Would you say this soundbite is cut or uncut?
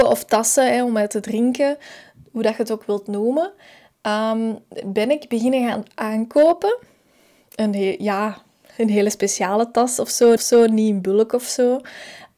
cut